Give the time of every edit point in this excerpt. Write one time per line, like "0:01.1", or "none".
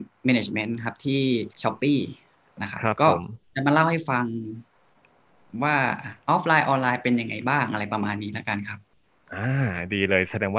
0:01.5